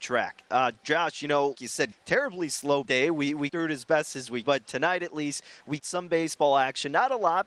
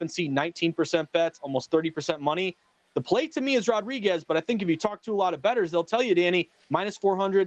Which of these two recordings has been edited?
first; 6 cuts; at 1.5 s, 1.9 s, 2.8 s, 3.5 s, 4.4 s, 5.8 s

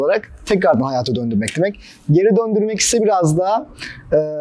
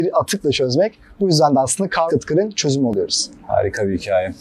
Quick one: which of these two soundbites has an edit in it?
second; 1 cut; at 2.1 s

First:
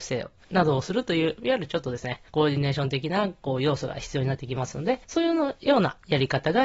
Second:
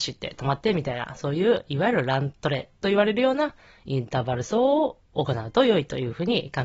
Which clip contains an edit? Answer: first; 2 cuts; at 2.3 s, 5.0 s

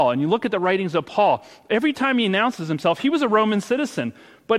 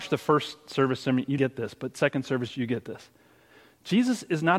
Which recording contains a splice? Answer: second; 1 cut; at 1.4 s

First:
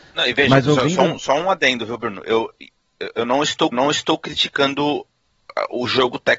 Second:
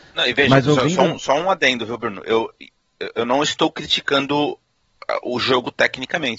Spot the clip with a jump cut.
first; 1 cut; at 3.7 s

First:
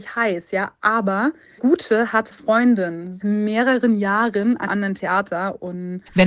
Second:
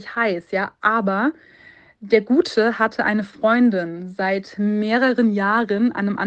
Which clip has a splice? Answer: first; 4 cuts; at 1.6 s, 2.3 s, 3.2 s, 4.7 s

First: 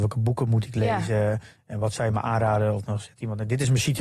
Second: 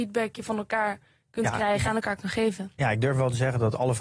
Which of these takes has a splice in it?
second; 1 cut; at 1.8 s

